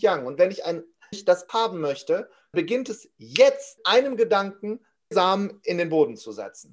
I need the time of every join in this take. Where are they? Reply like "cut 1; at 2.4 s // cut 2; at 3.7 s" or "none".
cut 1; at 1.1 s // cut 2; at 1.5 s // cut 3; at 2.5 s // cut 4; at 3.8 s // cut 5; at 5.1 s